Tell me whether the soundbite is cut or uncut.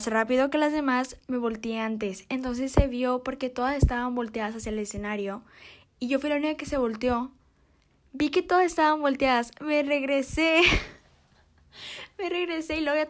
uncut